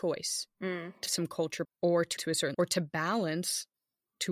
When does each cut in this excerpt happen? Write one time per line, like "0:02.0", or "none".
0:01.1
0:01.6
0:02.2
0:02.5